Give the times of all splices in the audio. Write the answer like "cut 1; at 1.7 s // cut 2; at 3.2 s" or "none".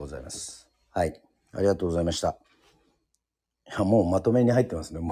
none